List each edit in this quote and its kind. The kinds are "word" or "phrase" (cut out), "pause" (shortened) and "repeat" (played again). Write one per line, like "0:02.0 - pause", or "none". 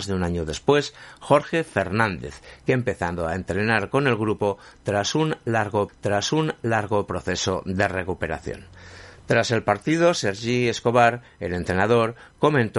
0:05.9 - repeat